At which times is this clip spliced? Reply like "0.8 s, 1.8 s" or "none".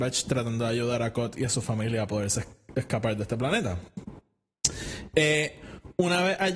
none